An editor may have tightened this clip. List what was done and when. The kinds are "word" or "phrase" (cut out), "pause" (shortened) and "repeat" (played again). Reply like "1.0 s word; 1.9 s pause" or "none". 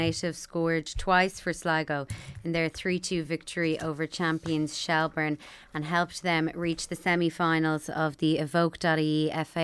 none